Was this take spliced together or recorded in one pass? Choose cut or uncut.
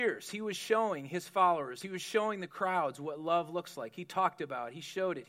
uncut